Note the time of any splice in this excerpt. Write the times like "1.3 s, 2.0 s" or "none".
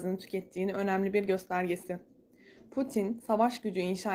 none